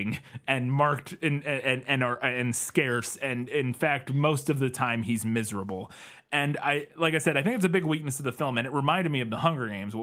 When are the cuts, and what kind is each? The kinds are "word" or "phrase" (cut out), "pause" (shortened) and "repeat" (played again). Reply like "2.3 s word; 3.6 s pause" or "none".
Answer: none